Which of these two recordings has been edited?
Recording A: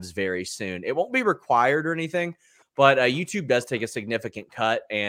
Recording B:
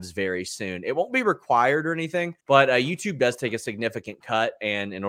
B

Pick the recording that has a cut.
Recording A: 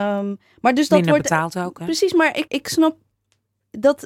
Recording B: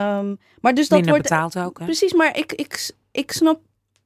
A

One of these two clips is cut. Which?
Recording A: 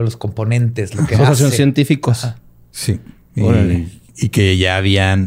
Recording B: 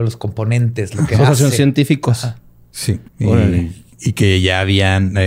B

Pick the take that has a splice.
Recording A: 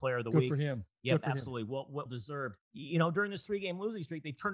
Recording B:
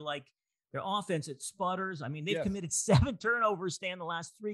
A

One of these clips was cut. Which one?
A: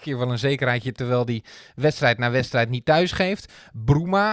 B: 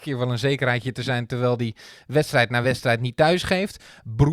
A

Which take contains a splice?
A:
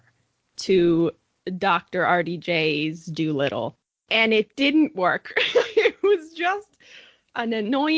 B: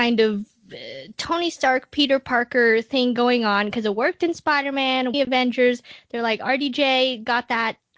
B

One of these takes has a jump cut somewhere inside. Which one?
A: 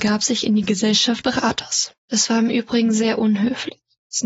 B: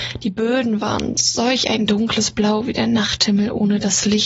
A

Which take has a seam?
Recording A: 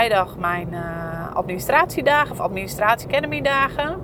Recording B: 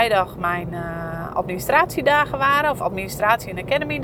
A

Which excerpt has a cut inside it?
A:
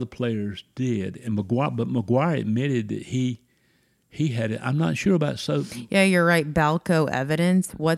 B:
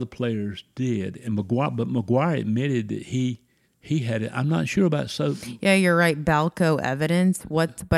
B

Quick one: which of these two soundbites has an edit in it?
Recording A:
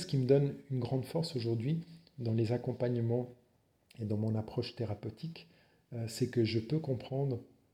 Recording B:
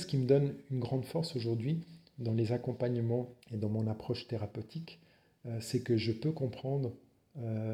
B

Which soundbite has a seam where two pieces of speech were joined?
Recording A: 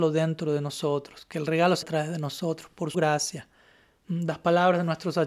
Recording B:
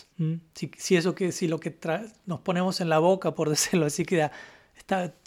A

